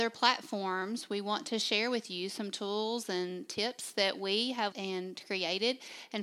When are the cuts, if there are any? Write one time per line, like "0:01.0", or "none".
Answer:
0:04.7